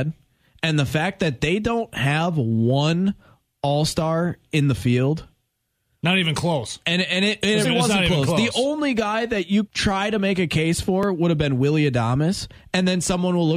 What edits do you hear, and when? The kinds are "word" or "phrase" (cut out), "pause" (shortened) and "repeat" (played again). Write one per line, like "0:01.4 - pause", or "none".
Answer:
0:07.6 - word
0:09.7 - word

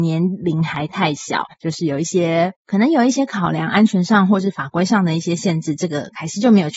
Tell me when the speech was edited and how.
0:01.5 - pause
0:02.6 - pause

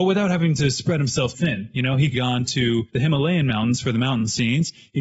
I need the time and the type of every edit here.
0:01.3 - word
0:02.1 - phrase
0:02.9 - pause

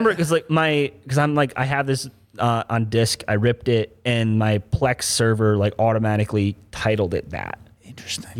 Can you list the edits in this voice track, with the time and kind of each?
none

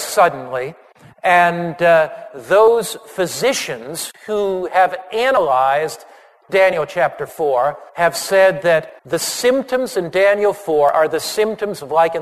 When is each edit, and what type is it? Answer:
0:07.9 - pause
0:09.0 - pause

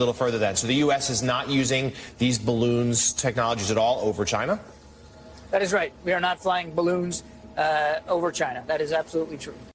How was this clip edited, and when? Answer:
none

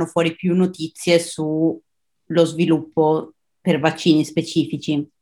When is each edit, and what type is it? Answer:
none

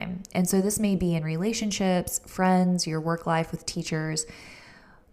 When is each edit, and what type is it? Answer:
none

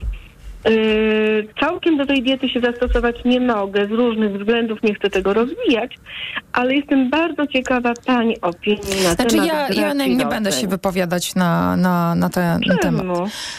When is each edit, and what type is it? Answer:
none

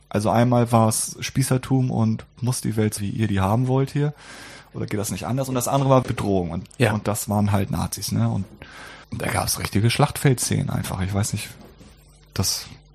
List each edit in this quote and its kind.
0:03.0 - word
0:06.0 - word
0:09.0 - pause

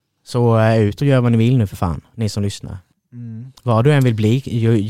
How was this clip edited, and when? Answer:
none

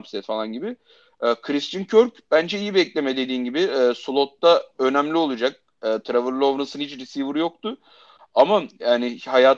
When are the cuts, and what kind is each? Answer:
none

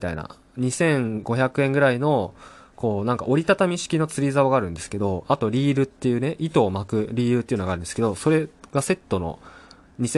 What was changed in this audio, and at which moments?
none

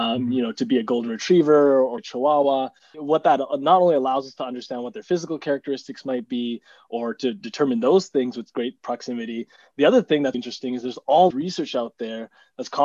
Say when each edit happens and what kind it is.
0:02.0 - word
0:02.9 - word
0:10.3 - word
0:11.3 - word

